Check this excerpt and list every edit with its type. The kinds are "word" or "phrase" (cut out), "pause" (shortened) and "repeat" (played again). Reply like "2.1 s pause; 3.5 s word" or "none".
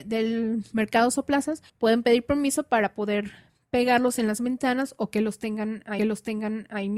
1.7 s pause; 6.0 s repeat

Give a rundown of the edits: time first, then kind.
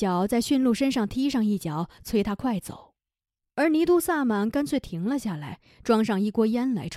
none

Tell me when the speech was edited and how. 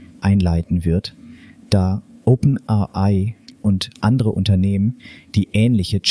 none

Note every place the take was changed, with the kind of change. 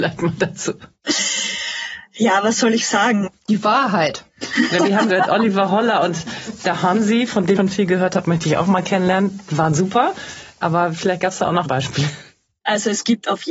5.1 s word; 7.6 s word; 11.6 s word

